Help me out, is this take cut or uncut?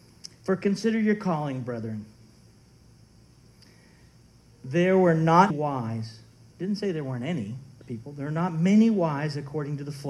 cut